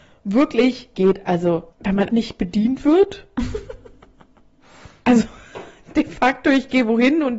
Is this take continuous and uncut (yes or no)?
no